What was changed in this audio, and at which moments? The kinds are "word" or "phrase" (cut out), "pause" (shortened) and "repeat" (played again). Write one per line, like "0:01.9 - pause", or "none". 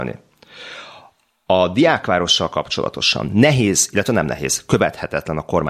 none